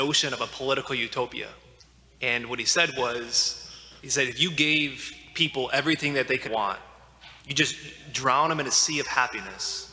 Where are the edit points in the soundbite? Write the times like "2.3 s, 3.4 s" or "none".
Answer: 1.8 s, 4.0 s, 6.4 s, 7.4 s